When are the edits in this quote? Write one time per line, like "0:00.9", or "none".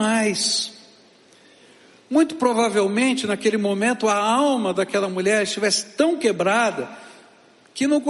none